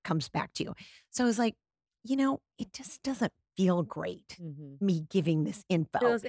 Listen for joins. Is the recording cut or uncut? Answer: uncut